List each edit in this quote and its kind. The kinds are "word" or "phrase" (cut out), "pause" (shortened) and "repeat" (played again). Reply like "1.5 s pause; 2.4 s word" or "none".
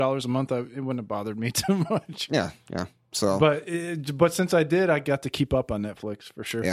none